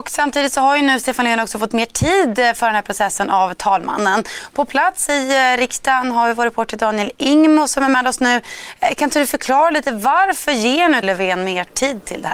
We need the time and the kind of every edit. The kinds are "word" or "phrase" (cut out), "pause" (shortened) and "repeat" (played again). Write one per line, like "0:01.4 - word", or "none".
0:11.0 - word